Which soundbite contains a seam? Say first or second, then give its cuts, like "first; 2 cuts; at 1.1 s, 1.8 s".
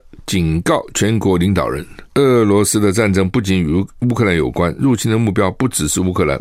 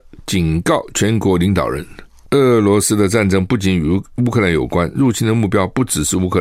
first; 1 cut; at 2.1 s